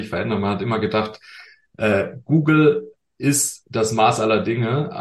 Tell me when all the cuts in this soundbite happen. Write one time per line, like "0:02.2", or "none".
none